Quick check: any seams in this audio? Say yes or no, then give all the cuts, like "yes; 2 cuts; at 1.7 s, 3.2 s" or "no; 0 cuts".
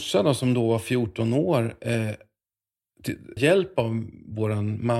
yes; 1 cut; at 3.4 s